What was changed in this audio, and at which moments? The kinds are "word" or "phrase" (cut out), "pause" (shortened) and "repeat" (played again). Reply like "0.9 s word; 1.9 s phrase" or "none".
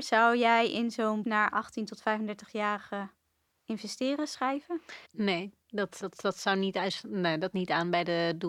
1.2 s word; 5.0 s pause; 6.0 s word; 7.5 s word

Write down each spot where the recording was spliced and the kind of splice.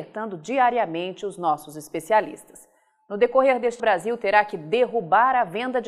3.8 s phrase

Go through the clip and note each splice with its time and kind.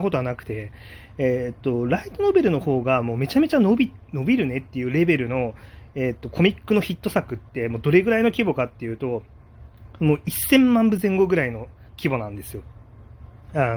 11.9 s pause

